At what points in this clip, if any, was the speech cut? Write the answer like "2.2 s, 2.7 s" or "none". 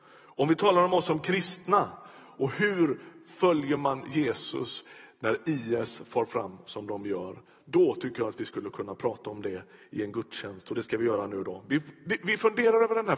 none